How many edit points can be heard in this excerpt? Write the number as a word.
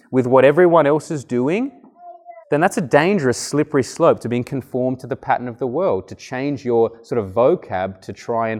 one